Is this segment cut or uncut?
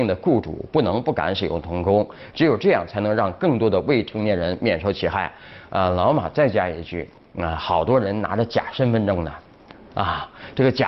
uncut